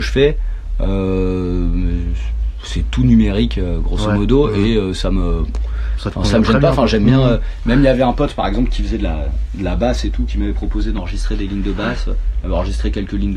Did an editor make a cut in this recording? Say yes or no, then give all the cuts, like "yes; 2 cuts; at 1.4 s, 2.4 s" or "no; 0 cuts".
no; 0 cuts